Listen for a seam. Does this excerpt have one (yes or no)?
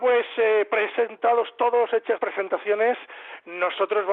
yes